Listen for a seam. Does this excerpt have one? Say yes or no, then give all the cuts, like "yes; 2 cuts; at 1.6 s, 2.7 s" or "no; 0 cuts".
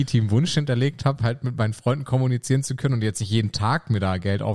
no; 0 cuts